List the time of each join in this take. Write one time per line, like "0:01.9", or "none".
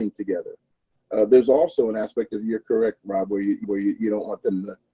0:03.6